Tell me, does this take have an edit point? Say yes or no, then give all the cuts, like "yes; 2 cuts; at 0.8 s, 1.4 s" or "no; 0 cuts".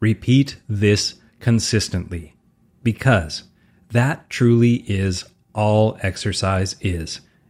no; 0 cuts